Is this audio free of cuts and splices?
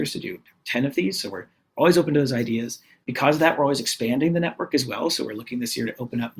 yes; 0 cuts

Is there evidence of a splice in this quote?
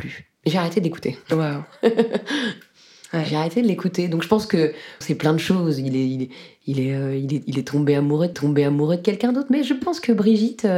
yes; 2 cuts; at 5.0 s, 8.3 s

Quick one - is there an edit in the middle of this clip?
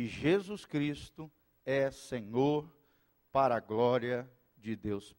no; 0 cuts

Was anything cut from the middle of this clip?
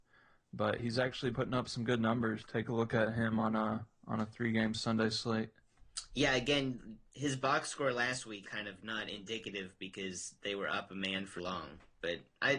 yes; 4 cuts; at 1.3 s, 2.4 s, 8.4 s, 11.4 s

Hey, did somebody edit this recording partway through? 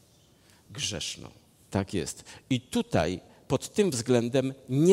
no; 0 cuts

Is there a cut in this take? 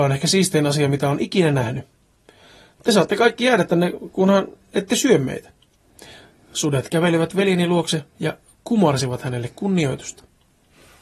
no; 0 cuts

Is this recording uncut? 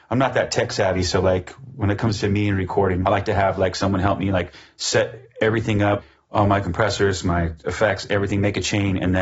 yes; 0 cuts

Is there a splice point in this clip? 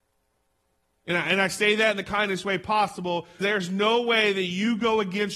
yes; 1 cut; at 3.4 s

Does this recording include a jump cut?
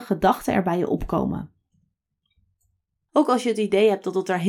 no; 0 cuts

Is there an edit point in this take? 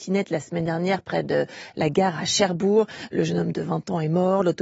no; 0 cuts

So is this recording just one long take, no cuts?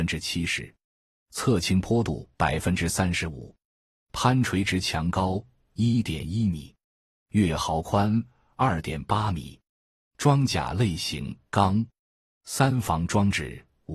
no; 2 cuts; at 2.3 s, 11.4 s

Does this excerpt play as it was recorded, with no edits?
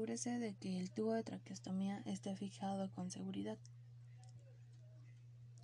yes; 0 cuts

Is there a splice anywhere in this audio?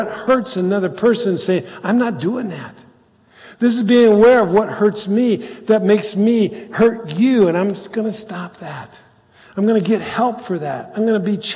no; 0 cuts

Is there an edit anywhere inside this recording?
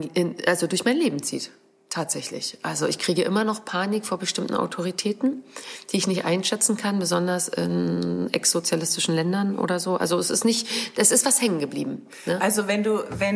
no; 0 cuts

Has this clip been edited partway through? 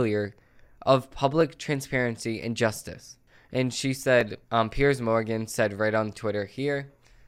yes; 1 cut; at 4.4 s

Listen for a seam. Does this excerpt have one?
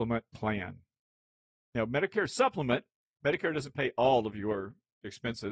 no; 0 cuts

